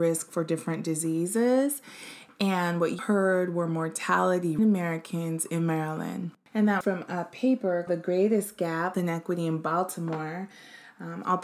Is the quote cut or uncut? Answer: cut